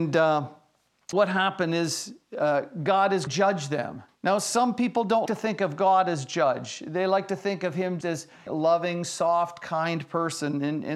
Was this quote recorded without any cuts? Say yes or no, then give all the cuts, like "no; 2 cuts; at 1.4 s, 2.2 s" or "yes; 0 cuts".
no; 6 cuts; at 1.1 s, 3.3 s, 4.1 s, 5.3 s, 8.0 s, 8.5 s